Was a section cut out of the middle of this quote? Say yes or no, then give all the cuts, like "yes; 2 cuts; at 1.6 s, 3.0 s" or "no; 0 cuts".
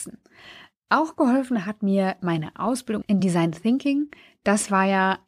no; 0 cuts